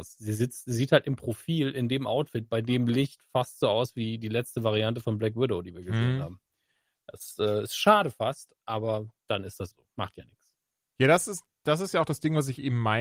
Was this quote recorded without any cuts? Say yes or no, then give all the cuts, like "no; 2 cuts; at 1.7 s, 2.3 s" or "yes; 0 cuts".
no; 1 cut; at 9.7 s